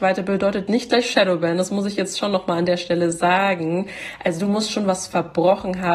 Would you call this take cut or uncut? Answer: uncut